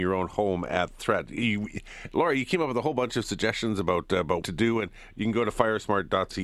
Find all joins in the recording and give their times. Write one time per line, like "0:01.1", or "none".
0:04.4